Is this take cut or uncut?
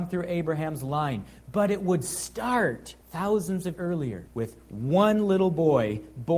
cut